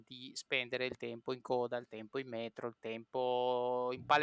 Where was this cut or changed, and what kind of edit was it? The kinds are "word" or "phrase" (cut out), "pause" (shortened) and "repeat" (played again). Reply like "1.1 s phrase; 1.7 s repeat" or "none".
none